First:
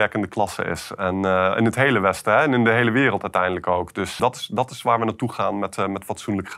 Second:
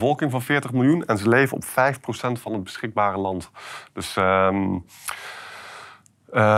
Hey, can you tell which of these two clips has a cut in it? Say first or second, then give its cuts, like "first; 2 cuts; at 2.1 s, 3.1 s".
first; 1 cut; at 4.2 s